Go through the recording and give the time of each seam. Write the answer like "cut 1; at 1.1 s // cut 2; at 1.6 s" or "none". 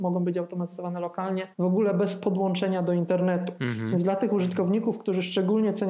cut 1; at 1.5 s